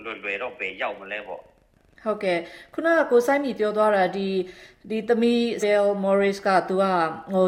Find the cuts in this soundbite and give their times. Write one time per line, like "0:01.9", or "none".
0:05.6

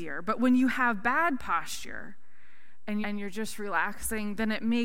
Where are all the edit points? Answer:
0:03.0

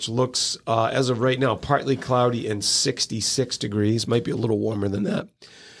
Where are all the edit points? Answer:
none

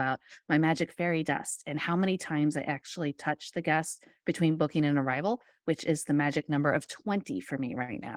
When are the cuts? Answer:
none

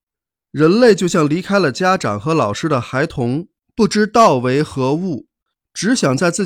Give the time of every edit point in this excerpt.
0:03.6

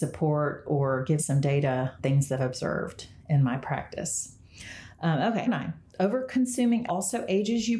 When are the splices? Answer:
0:01.2
0:02.0
0:02.4
0:05.5
0:06.9

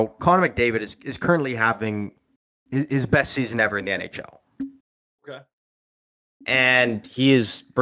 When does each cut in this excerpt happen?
none

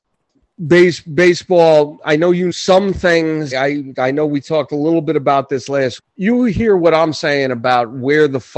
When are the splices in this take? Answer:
0:02.5
0:03.5
0:06.0

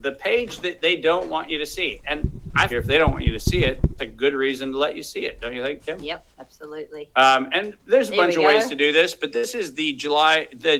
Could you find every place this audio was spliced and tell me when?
0:02.7
0:04.0
0:06.3

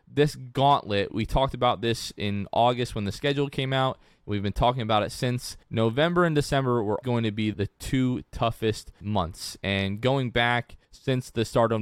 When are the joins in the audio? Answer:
0:01.1
0:05.6
0:07.0
0:07.5
0:09.0
0:10.8

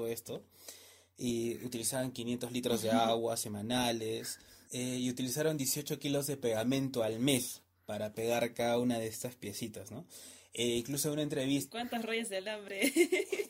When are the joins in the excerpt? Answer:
none

